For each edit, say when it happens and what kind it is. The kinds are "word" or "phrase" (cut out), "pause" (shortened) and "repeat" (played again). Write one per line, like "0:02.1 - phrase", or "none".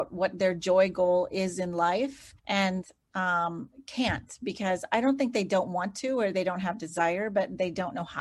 0:02.4 - pause